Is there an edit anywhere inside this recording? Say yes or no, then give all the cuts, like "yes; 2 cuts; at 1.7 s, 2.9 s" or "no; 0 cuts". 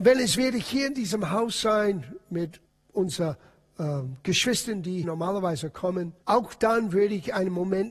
yes; 3 cuts; at 2.6 s, 5.0 s, 6.2 s